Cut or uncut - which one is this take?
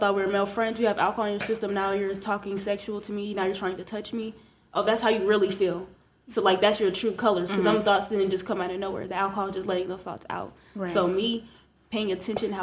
uncut